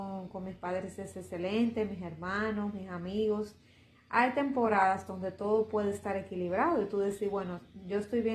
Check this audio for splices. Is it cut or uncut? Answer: uncut